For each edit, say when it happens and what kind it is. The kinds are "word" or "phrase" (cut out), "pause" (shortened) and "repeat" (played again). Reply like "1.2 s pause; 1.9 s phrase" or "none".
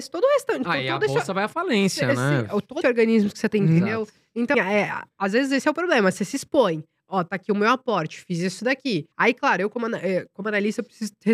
2.8 s word; 3.5 s phrase; 4.5 s word; 9.1 s pause

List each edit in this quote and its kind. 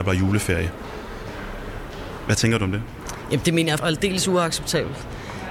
3.8 s word

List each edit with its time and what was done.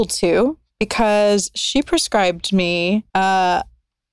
3.1 s pause

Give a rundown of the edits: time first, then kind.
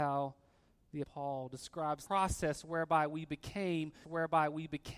1.0 s word; 2.1 s word; 4.0 s repeat

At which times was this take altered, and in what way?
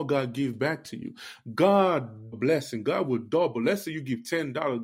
2.3 s phrase

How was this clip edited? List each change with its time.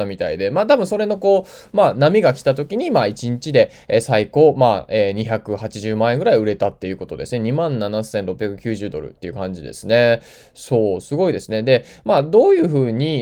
none

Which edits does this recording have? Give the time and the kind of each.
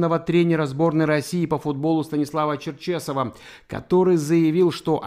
none

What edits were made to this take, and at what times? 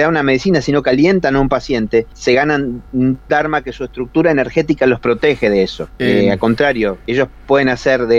none

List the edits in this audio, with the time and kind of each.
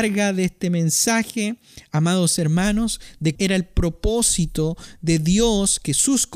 3.3 s word

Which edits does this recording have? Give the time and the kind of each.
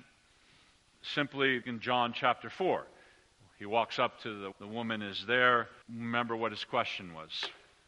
1.6 s word; 4.5 s word; 5.8 s pause

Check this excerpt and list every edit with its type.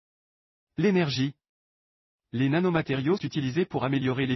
3.2 s word

